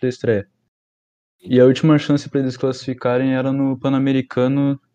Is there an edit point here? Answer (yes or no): no